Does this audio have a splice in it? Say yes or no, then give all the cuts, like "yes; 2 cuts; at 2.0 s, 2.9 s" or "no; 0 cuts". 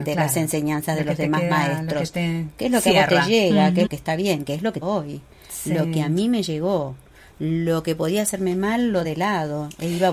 yes; 3 cuts; at 3.9 s, 4.8 s, 9.0 s